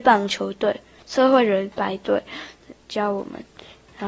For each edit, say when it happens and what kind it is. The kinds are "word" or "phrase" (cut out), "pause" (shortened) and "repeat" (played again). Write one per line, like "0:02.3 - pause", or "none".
0:01.7 - pause